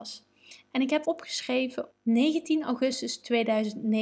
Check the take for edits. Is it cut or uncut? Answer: cut